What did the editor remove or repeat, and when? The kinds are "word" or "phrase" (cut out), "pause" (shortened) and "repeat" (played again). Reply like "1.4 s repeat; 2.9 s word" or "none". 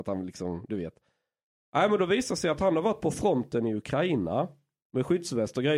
none